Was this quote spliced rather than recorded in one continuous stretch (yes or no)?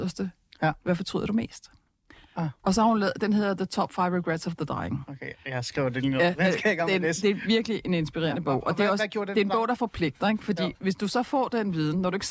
no